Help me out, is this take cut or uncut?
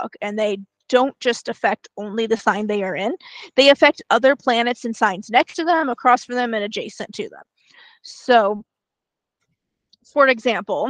uncut